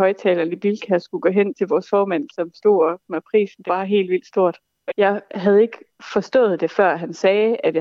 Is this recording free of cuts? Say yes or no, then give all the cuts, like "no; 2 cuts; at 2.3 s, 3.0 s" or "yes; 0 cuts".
no; 4 cuts; at 2.3 s, 3.0 s, 3.7 s, 4.9 s